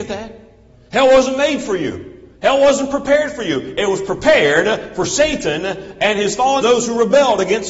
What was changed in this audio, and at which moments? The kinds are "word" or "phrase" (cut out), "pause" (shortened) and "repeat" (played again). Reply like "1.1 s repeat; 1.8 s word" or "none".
2.4 s pause; 6.6 s word